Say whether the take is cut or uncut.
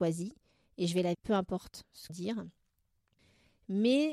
cut